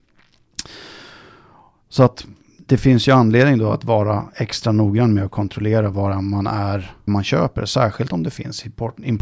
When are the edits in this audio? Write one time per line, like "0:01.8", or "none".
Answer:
0:07.1

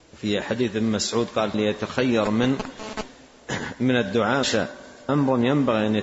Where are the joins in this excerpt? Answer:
0:01.5
0:04.4
0:05.1

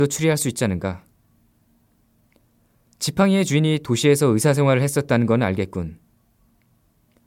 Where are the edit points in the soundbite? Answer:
none

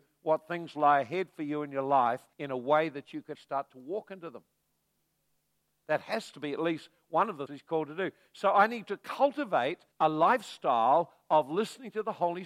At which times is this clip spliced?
0:02.3
0:03.3
0:07.5
0:09.9

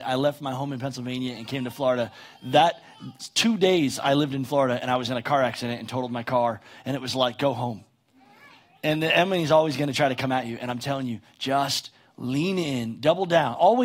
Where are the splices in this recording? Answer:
none

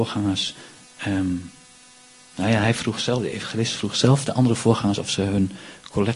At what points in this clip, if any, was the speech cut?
none

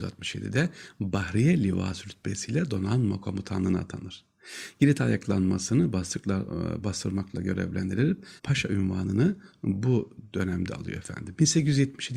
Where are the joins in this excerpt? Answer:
0:08.4

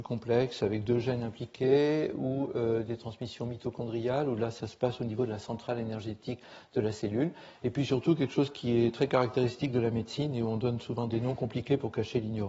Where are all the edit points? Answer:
none

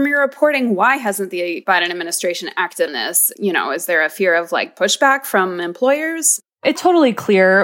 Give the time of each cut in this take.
0:02.9
0:06.8

